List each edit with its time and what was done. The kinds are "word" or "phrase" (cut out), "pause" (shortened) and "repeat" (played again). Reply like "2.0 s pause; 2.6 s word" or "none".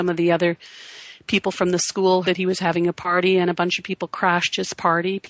2.2 s word